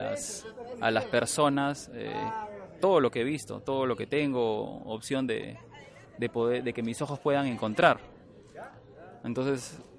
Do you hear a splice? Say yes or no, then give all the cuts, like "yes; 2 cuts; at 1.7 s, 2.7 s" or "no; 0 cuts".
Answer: no; 0 cuts